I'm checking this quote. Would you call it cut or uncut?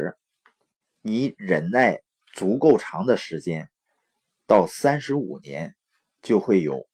uncut